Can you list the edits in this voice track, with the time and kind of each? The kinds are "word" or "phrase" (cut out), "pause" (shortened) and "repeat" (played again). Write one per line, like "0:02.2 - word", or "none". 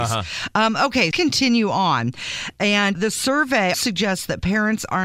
0:01.1 - phrase
0:02.9 - word
0:03.7 - word